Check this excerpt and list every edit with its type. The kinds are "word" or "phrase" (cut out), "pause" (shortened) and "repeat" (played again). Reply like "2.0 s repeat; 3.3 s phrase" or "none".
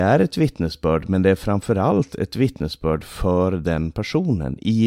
none

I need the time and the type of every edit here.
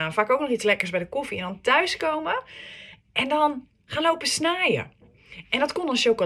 none

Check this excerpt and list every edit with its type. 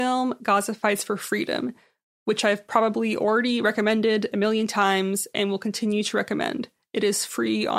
none

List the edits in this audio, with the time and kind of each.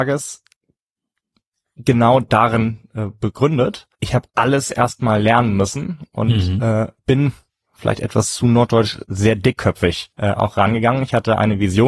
3.9 s pause; 7.0 s pause; 10.1 s pause

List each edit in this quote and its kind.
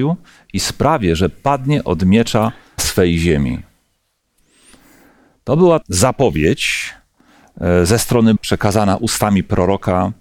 2.8 s word; 5.8 s word; 8.4 s word

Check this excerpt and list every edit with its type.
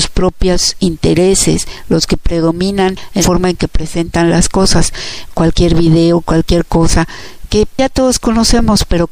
3.2 s word

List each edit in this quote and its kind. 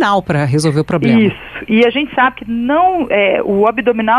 none

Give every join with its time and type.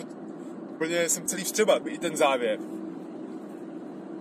1.3 s word; 1.8 s word

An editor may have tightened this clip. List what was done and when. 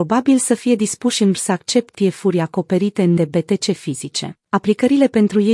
1.3 s word; 1.9 s word; 3.2 s word; 4.5 s pause

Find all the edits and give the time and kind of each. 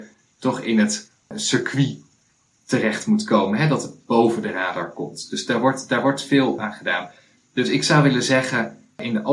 none

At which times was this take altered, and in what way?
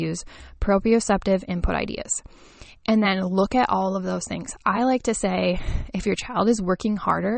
none

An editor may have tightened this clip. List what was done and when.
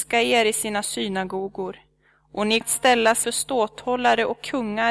2.6 s word; 3.2 s word

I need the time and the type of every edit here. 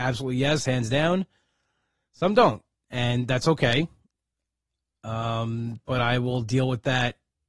none

